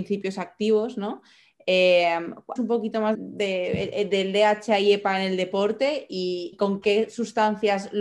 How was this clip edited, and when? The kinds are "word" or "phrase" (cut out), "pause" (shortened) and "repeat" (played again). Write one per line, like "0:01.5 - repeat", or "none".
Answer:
0:02.6 - word
0:03.1 - word
0:06.5 - word